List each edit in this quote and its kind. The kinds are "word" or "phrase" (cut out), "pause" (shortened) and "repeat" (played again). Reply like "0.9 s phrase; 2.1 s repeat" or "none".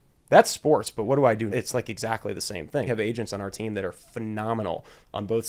1.5 s word; 2.9 s word